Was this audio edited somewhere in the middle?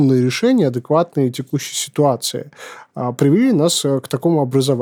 no; 0 cuts

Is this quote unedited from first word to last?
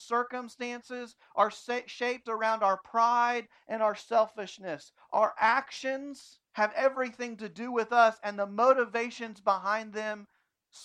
no; 1 cut; at 6.4 s

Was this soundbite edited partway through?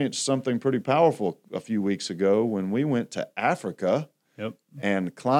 no; 0 cuts

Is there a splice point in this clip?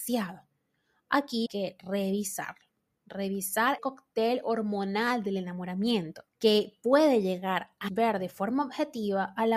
yes; 4 cuts; at 1.5 s, 3.8 s, 6.3 s, 7.9 s

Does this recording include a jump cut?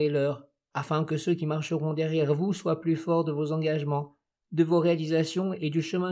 no; 0 cuts

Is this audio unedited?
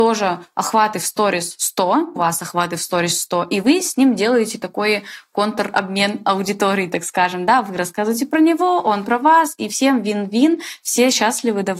no; 1 cut; at 2.2 s

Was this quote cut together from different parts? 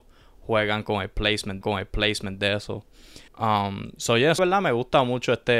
yes; 3 cuts; at 1.6 s, 3.3 s, 4.4 s

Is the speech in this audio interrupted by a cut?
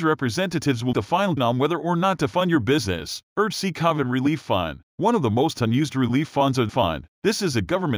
yes; 3 cuts; at 0.9 s, 1.4 s, 6.7 s

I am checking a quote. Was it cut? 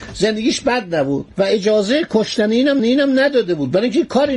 yes; 2 cuts; at 1.3 s, 2.8 s

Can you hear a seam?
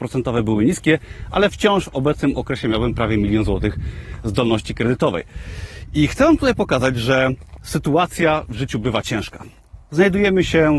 no; 0 cuts

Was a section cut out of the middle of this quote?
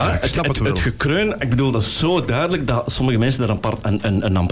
no; 0 cuts

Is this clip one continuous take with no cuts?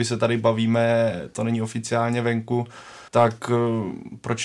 no; 1 cut; at 3.1 s

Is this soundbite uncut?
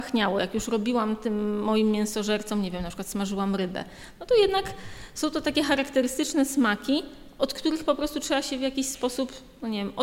yes; 0 cuts

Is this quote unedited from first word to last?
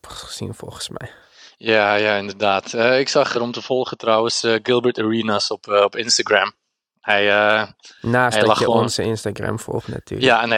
no; 1 cut; at 3.3 s

